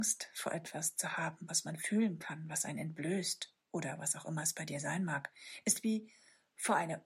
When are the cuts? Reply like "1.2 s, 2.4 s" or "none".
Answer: 3.6 s